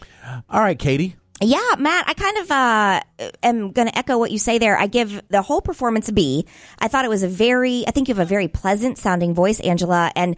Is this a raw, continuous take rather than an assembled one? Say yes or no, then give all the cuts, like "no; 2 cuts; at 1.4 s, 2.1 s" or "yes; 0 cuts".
yes; 0 cuts